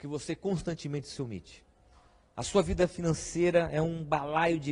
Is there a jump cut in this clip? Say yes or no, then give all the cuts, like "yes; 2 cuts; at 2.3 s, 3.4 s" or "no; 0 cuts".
no; 0 cuts